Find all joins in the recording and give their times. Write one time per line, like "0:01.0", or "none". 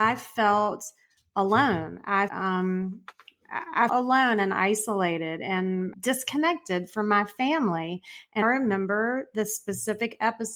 0:02.3
0:03.9
0:05.9
0:08.4